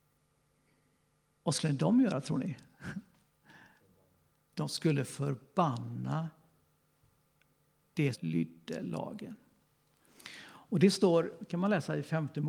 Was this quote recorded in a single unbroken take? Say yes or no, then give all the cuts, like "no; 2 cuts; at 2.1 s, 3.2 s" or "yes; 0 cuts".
no; 1 cut; at 8.1 s